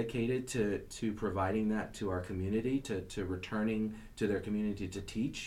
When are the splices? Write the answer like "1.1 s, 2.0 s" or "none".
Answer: none